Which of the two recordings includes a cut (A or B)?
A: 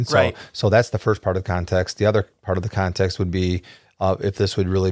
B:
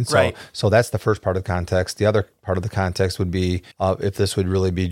B